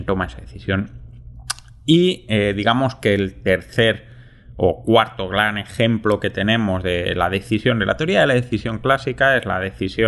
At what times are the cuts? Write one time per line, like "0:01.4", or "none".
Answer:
none